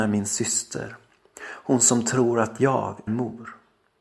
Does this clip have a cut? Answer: yes; 1 cut; at 3.1 s

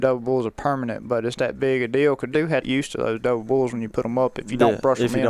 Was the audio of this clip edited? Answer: yes; 3 cuts; at 1.3 s, 2.3 s, 2.6 s

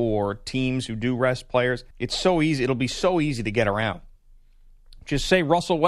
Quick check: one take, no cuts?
no; 1 cut; at 1.9 s

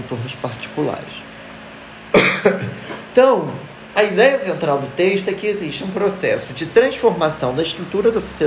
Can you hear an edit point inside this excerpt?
no; 0 cuts

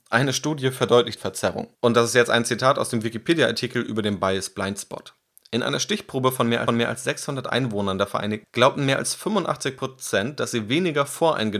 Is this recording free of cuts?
no; 4 cuts; at 1.2 s, 1.7 s, 6.7 s, 8.4 s

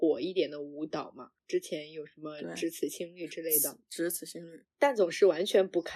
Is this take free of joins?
no; 2 cuts; at 1.4 s, 4.6 s

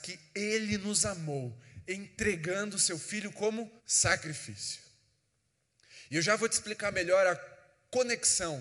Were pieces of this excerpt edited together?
yes; 1 cut; at 3.8 s

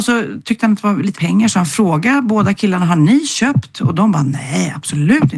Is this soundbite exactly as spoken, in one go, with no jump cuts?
no; 1 cut; at 1.1 s

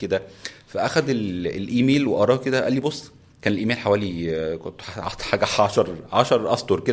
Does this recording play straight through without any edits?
yes; 0 cuts

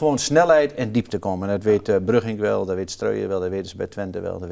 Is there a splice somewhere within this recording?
no; 0 cuts

